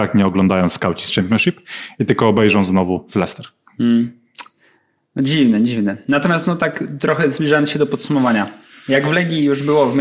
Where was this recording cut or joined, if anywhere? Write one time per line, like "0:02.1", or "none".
none